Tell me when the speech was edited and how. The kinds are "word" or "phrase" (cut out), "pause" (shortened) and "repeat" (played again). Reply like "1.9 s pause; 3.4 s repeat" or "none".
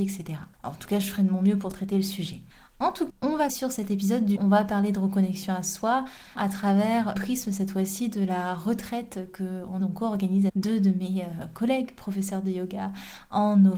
3.1 s word; 3.5 s word; 4.3 s word; 6.4 s word; 7.2 s word; 9.8 s word; 10.5 s word